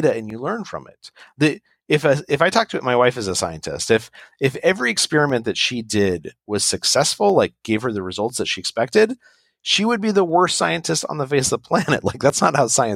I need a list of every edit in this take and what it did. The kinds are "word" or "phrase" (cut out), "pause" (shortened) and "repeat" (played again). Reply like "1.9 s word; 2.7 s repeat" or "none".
none